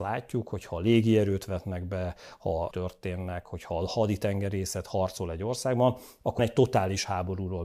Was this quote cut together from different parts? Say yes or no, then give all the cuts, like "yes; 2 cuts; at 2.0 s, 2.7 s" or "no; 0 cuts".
yes; 2 cuts; at 2.7 s, 6.4 s